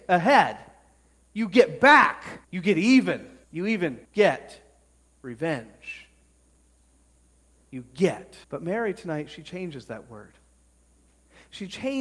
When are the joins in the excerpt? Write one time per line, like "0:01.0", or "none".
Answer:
0:02.4
0:03.4
0:04.0
0:08.4